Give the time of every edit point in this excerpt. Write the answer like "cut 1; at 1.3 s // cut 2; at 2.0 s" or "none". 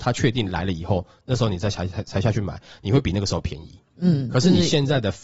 none